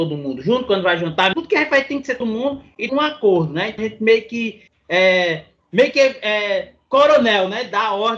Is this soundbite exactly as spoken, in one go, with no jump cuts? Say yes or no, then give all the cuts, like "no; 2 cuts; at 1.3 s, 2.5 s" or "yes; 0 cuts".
no; 5 cuts; at 1.3 s, 2.2 s, 2.9 s, 3.8 s, 4.7 s